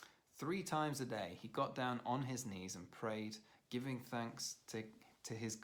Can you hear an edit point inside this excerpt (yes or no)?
no